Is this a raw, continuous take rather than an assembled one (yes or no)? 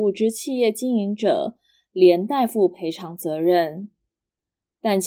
yes